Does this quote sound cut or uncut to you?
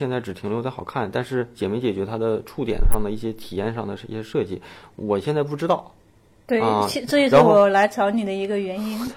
uncut